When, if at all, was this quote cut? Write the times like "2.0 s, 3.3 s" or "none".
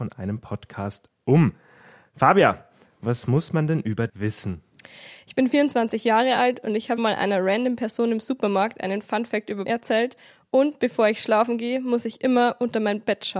4.1 s, 7.0 s, 9.7 s